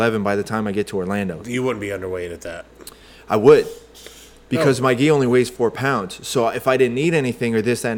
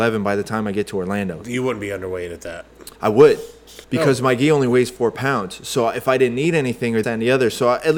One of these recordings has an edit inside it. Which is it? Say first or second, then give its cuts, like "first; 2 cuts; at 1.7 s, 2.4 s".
second; 3 cuts; at 2.9 s, 3.8 s, 7.0 s